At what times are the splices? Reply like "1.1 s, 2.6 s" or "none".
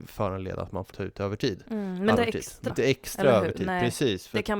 0.9 s, 2.2 s, 2.7 s